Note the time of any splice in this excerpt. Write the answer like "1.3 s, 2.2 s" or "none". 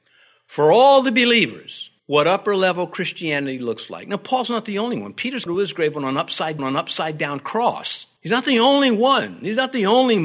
2.0 s, 5.5 s, 6.6 s, 8.2 s